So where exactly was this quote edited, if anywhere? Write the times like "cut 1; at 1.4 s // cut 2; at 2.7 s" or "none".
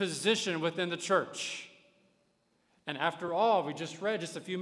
none